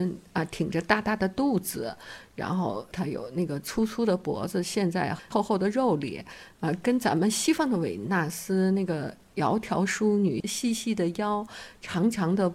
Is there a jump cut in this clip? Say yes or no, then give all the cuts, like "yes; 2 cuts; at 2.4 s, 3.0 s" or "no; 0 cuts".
no; 0 cuts